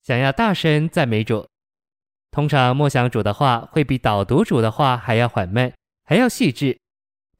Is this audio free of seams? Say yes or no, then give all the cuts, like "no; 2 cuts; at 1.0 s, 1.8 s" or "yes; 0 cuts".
yes; 0 cuts